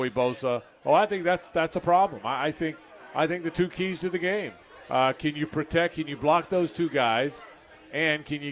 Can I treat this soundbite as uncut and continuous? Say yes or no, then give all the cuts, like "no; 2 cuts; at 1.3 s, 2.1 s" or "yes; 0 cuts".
yes; 0 cuts